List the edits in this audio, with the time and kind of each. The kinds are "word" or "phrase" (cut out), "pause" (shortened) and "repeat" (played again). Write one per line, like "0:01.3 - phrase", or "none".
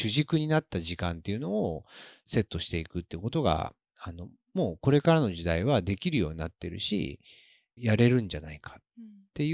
0:07.8 - phrase